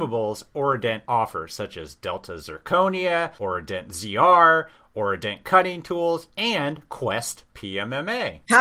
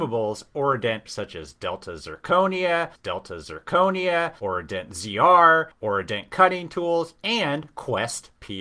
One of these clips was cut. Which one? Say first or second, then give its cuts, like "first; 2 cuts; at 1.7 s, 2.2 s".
second; 3 cuts; at 1.1 s, 3.0 s, 5.7 s